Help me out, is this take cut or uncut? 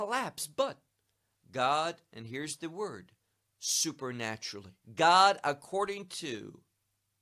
cut